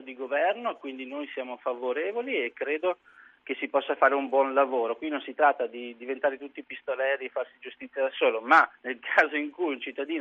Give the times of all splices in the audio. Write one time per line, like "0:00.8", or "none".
0:08.8